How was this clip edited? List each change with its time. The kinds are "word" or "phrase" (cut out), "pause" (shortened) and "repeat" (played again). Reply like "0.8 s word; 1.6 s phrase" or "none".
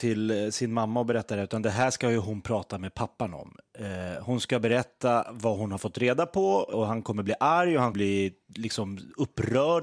6.7 s word; 7.9 s word